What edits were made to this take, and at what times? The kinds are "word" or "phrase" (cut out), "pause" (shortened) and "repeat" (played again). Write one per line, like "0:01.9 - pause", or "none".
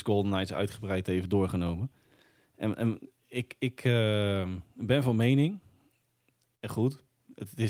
none